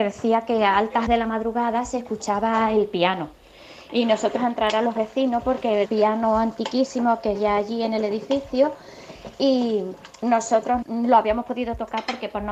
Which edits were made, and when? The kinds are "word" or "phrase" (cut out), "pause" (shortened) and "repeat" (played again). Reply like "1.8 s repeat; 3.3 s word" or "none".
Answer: 1.1 s word; 4.4 s word; 5.8 s word; 7.3 s word; 10.8 s word

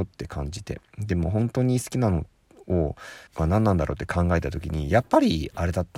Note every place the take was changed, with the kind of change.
3.3 s pause

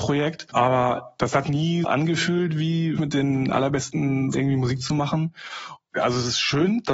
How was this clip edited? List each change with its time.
1.4 s word; 1.8 s word; 3.0 s word; 4.3 s word

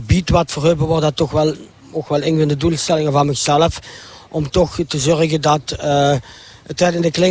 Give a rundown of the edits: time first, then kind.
none

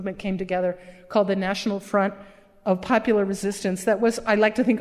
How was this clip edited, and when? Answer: none

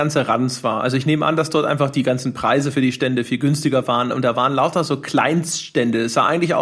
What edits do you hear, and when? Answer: none

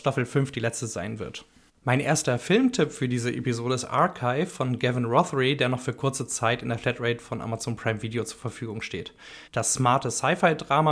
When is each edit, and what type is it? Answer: 1.7 s pause; 9.5 s pause

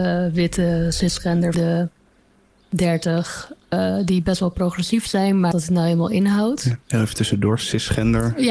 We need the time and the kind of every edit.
1.5 s phrase; 5.5 s phrase

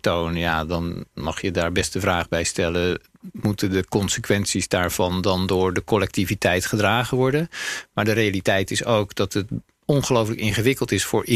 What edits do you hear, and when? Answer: none

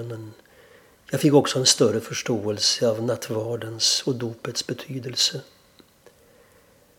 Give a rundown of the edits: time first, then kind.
none

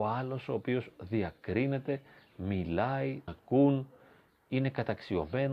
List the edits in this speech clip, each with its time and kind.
3.3 s word

